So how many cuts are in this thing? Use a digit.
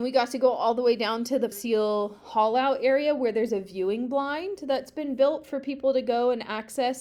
1